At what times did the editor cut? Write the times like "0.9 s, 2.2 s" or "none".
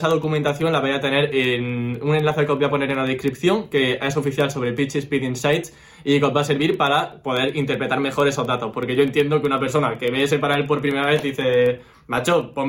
none